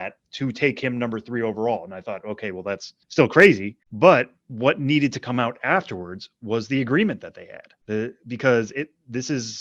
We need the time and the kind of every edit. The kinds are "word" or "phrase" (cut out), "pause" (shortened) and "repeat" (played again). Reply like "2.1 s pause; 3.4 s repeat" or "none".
3.0 s pause; 3.8 s pause; 7.8 s pause

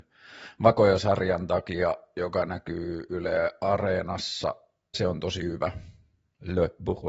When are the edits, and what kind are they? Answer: 4.9 s word

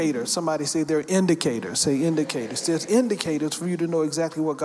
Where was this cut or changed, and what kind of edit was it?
none

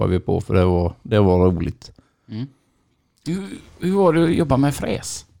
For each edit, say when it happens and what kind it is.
none

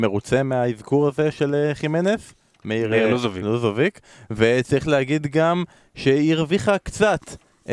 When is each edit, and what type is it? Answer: none

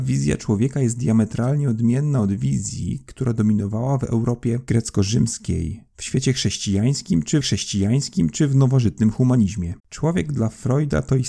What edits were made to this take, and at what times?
7.4 s repeat; 9.8 s pause

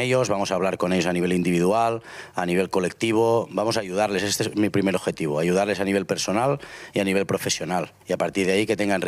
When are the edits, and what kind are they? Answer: 8.0 s pause

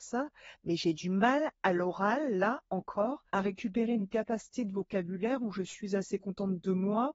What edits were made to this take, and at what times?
3.3 s pause

